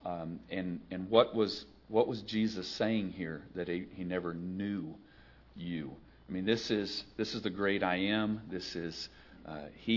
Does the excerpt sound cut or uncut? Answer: uncut